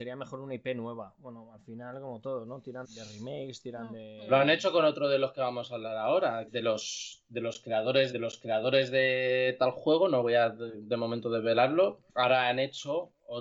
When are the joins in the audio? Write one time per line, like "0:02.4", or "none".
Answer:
0:02.8
0:06.5
0:08.1
0:12.1

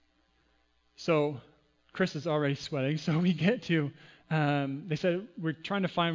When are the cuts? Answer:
none

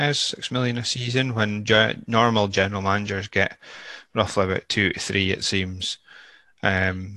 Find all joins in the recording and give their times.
none

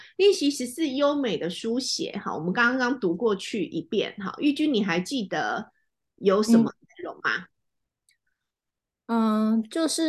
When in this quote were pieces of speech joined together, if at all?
none

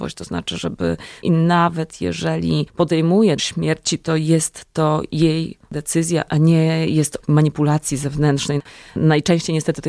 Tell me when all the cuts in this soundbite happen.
0:01.2
0:03.4
0:07.2

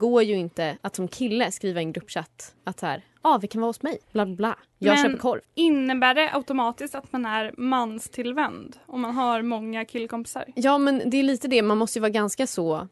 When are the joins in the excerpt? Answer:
0:02.6
0:04.0
0:05.4

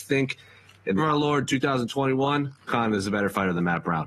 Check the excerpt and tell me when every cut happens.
0:01.0
0:02.7

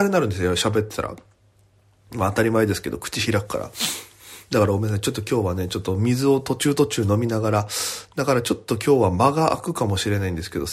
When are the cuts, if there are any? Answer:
none

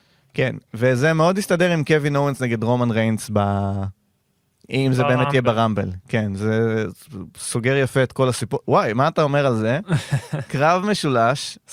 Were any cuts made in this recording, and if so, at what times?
none

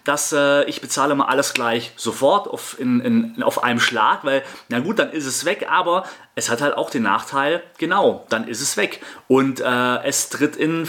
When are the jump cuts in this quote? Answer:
none

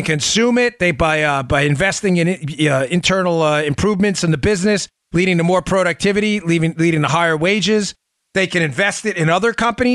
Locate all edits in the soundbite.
none

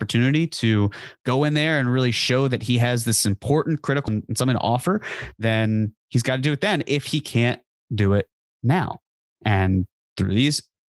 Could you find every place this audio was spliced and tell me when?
0:04.1

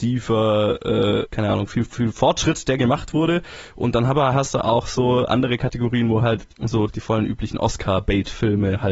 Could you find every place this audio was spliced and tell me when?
0:06.5

